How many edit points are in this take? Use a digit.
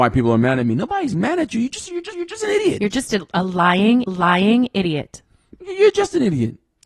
2